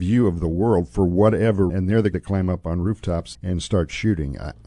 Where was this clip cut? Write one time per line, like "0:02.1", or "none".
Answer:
0:01.7
0:02.1
0:03.3